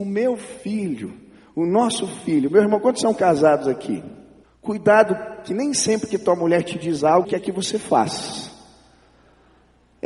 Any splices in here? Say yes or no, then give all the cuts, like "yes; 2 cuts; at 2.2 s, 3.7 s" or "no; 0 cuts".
yes; 2 cuts; at 4.4 s, 7.2 s